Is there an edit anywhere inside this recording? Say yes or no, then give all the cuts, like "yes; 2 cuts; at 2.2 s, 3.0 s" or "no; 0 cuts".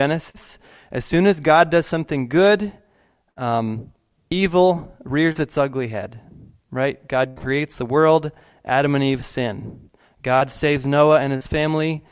no; 0 cuts